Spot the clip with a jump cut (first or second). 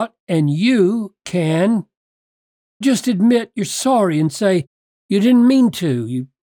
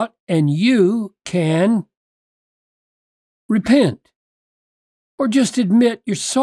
first